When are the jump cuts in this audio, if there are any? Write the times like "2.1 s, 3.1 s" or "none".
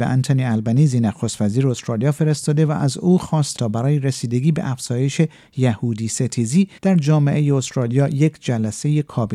3.6 s, 6.8 s

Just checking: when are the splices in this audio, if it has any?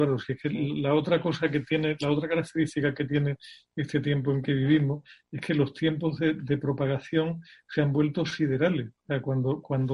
none

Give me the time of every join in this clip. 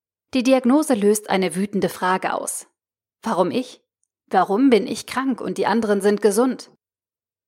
none

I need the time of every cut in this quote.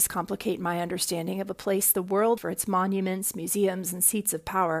2.4 s

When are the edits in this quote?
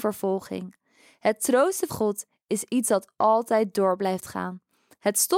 1.9 s

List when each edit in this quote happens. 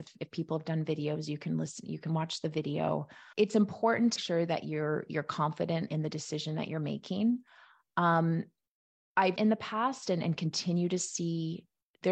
3.3 s, 4.2 s, 5.9 s, 9.4 s

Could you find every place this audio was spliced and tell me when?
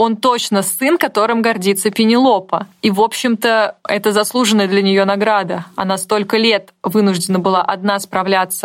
none

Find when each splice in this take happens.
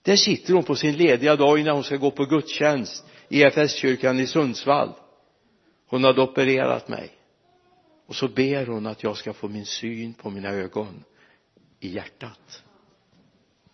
none

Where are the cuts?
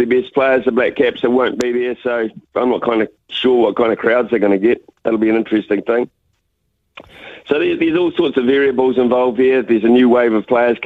2.4 s

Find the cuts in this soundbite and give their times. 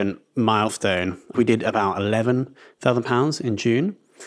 1.3 s

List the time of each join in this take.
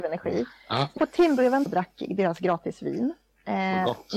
1.0 s, 1.7 s

